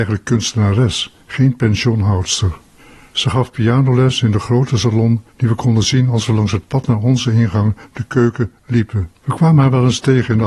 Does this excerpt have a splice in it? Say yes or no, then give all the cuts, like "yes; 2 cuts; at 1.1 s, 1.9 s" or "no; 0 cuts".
yes; 3 cuts; at 2.8 s, 5.3 s, 9.2 s